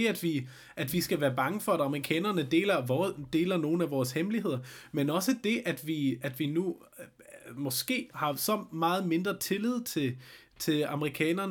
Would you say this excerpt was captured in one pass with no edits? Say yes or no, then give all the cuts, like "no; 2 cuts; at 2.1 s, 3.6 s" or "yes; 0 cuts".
no; 1 cut; at 8.1 s